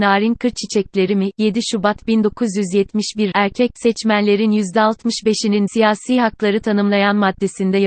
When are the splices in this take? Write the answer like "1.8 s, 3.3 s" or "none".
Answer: 3.3 s, 5.7 s